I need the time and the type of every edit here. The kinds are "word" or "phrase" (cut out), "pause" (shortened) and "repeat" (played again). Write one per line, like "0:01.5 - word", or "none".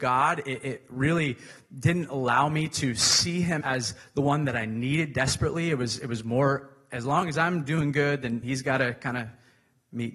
0:03.6 - word
0:08.4 - word

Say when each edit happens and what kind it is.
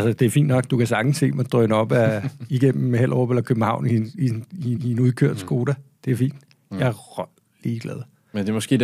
0:04.8 - repeat

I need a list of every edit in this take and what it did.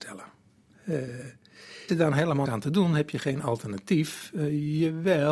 0:01.9 - word
0:02.5 - word

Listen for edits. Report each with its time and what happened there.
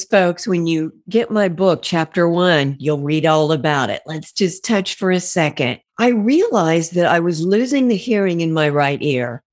0:05.9 - pause

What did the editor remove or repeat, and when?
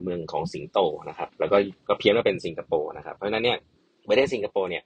0:01.8 - pause
0:03.7 - pause

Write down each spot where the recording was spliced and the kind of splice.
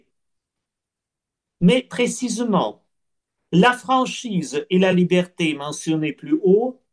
none

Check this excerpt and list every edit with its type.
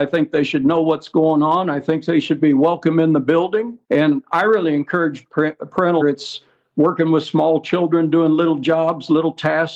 0:03.8 - pause
0:06.0 - phrase

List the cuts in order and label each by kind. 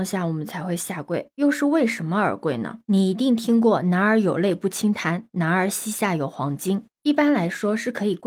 0:02.8 - pause

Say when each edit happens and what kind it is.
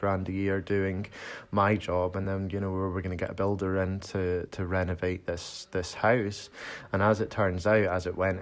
none

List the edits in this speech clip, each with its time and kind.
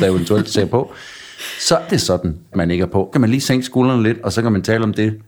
0:01.9 - word
0:02.5 - word
0:03.1 - word

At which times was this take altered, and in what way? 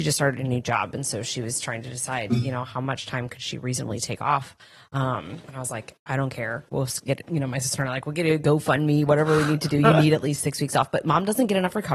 0:05.4 - pause

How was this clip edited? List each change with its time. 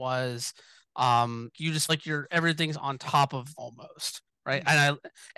0:01.5 - word
0:01.9 - word
0:03.5 - phrase

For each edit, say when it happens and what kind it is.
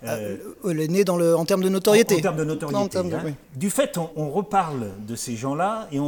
0:03.4 - pause
0:04.1 - word

